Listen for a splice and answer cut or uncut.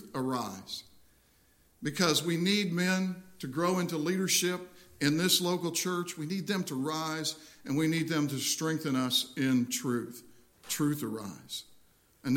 uncut